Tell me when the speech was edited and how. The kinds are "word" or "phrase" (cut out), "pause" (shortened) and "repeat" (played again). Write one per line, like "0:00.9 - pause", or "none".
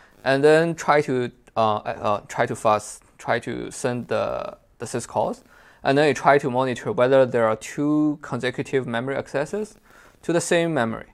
none

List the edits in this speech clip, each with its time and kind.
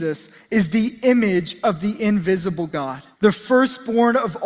0:03.1 - pause

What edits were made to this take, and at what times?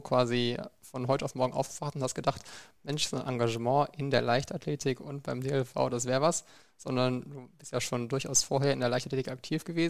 none

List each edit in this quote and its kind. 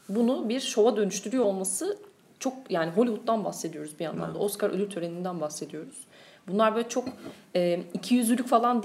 none

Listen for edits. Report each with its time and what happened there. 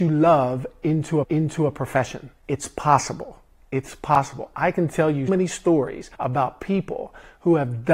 0:01.2 - repeat
0:02.4 - pause
0:03.6 - pause
0:05.3 - word
0:06.1 - pause

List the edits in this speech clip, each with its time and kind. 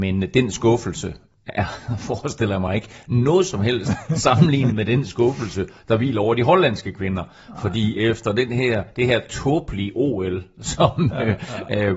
none

